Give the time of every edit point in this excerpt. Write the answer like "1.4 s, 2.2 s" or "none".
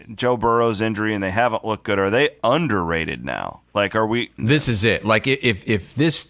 4.4 s